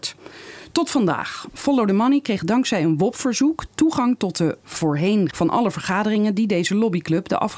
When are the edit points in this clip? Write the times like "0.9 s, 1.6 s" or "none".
5.3 s